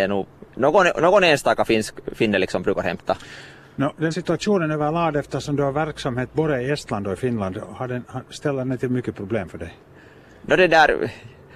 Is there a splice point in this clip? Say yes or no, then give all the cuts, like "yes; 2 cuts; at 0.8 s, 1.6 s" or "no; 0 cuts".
yes; 1 cut; at 4.1 s